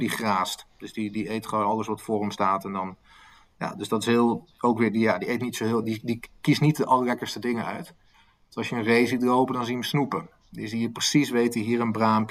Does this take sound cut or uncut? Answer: uncut